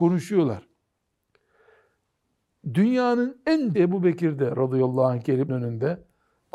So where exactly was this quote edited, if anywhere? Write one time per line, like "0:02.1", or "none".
0:03.7
0:05.5